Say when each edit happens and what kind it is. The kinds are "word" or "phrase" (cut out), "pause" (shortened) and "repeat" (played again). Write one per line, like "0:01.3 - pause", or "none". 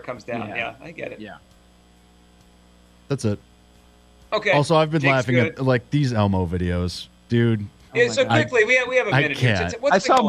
none